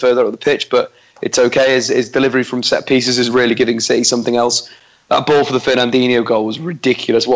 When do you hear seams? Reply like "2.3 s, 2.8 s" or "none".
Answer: none